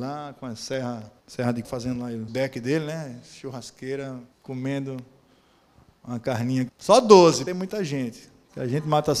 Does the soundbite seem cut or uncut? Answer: cut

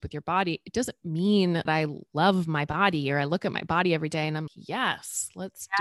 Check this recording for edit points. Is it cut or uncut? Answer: cut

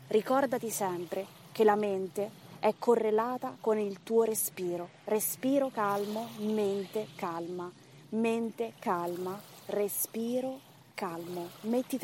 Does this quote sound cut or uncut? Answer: uncut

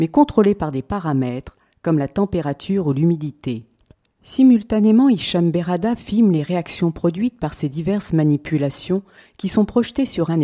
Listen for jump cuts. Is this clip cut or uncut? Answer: uncut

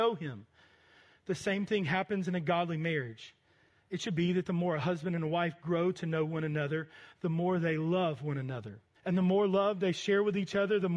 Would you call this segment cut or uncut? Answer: cut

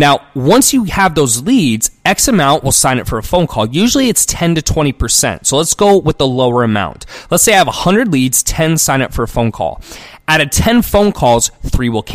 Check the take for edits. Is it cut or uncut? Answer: uncut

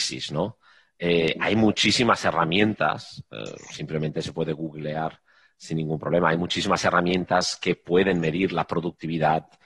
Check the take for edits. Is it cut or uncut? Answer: uncut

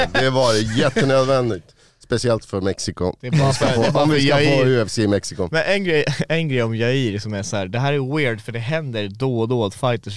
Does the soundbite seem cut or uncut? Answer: uncut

